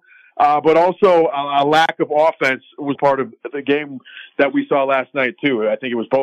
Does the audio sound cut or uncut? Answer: cut